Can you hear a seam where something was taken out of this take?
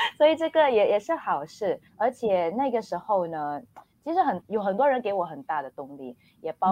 yes; 1 cut; at 1.9 s

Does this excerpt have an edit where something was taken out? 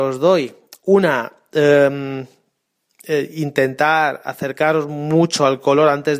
no; 0 cuts

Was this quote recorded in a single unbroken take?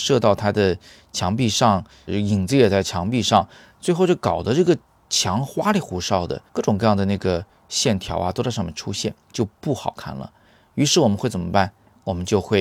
no; 3 cuts; at 2.1 s, 6.5 s, 9.2 s

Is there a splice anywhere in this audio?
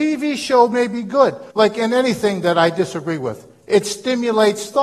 yes; 1 cut; at 1.5 s

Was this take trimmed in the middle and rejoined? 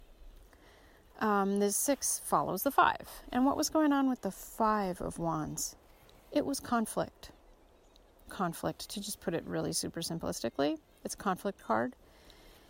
yes; 1 cut; at 8.3 s

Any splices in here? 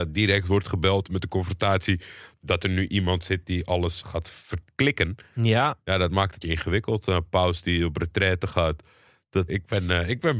yes; 3 cuts; at 4.0 s, 6.4 s, 9.5 s

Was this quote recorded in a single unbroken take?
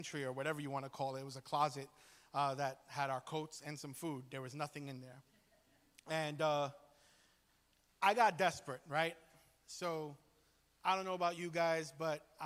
yes; 0 cuts

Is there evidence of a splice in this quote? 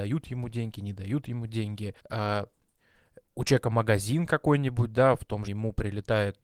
yes; 2 cuts; at 2.0 s, 5.5 s

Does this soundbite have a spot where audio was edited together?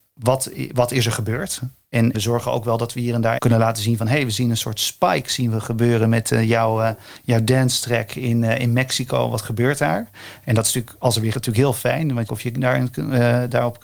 yes; 4 cuts; at 2.1 s, 3.4 s, 11.3 s, 12.3 s

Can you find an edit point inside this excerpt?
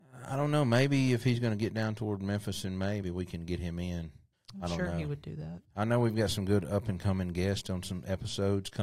yes; 3 cuts; at 3.0 s, 4.3 s, 5.6 s

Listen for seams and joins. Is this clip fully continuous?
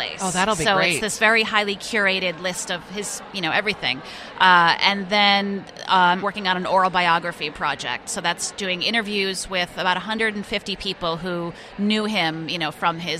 no; 1 cut; at 6.2 s

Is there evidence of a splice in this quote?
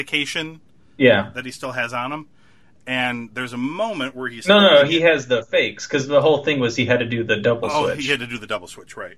no; 0 cuts

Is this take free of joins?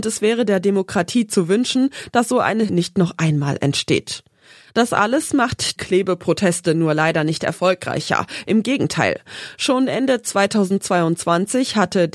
no; 2 cuts; at 2.7 s, 5.8 s

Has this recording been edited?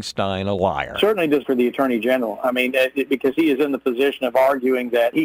yes; 1 cut; at 1.4 s

